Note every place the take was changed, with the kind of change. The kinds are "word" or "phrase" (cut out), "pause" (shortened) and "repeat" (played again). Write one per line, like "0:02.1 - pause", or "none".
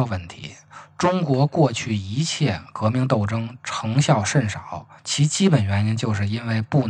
0:05.0 - pause